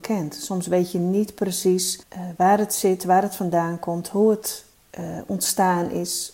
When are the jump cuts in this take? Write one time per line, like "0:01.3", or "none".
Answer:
0:02.0
0:04.7